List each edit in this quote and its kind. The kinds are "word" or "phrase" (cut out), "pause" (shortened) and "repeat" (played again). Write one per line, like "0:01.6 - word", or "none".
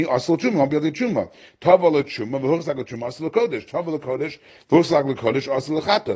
none